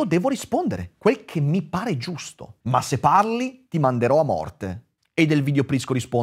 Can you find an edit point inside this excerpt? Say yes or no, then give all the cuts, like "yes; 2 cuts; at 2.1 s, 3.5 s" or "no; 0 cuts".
yes; 2 cuts; at 2.6 s, 5.0 s